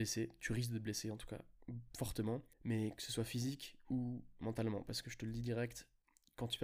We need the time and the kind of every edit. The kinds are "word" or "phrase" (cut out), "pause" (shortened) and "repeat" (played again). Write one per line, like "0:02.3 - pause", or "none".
0:02.5 - pause